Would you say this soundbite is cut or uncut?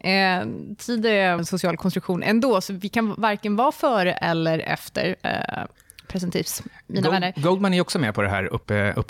cut